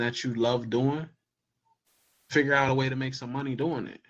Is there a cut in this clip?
yes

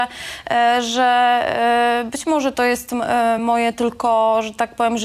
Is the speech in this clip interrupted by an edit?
no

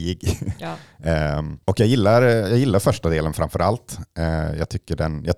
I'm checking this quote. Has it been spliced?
yes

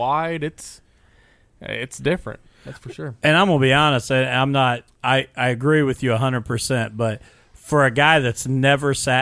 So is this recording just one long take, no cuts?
yes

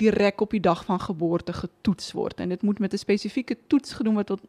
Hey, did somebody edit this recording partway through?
no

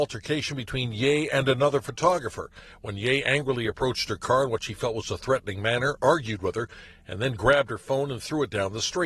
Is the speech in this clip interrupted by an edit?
no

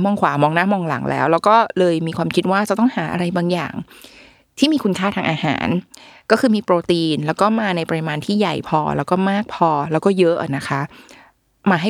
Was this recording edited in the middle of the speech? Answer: no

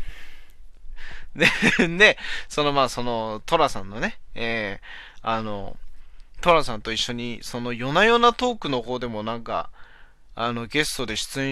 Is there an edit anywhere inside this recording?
no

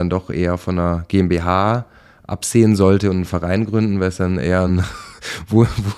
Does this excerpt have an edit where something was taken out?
no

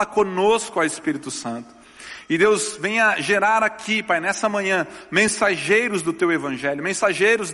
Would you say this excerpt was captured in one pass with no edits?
yes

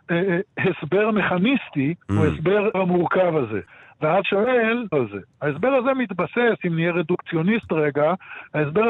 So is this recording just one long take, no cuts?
no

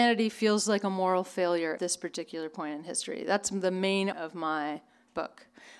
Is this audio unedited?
no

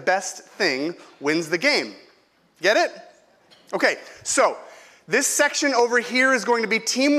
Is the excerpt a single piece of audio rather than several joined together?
yes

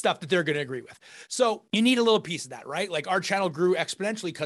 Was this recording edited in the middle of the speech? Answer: no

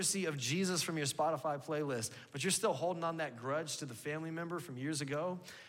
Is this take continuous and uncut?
yes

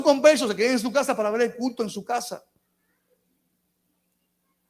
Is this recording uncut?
yes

